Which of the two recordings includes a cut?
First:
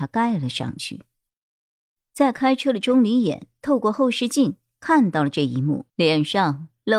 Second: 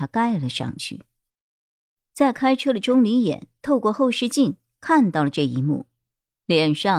first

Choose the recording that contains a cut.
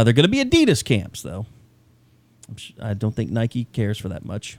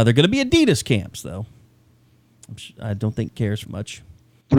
second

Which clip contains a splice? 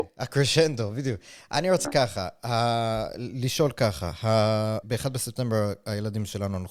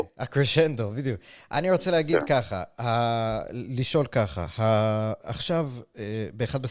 first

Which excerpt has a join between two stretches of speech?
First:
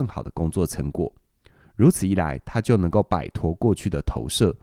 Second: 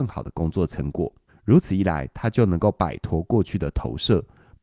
second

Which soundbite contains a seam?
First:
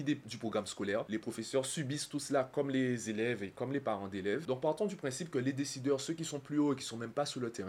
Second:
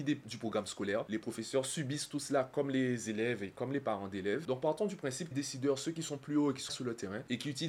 second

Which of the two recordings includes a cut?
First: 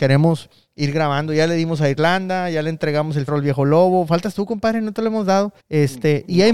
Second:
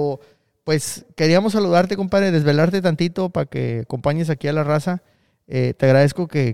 first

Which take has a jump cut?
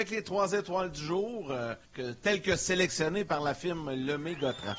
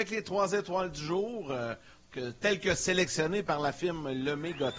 first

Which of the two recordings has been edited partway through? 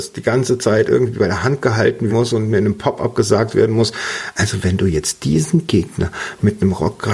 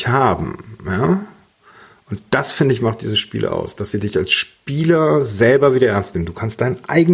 first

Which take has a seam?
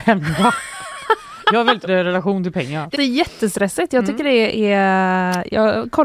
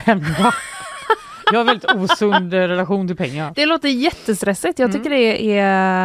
first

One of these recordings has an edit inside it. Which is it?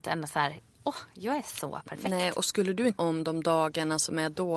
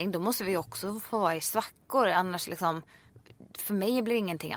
first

